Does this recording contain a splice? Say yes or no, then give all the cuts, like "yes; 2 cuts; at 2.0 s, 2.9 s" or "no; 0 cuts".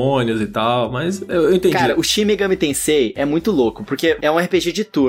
no; 0 cuts